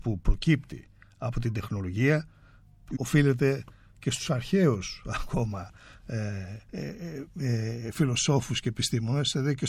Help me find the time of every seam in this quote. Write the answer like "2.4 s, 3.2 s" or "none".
3.0 s, 6.6 s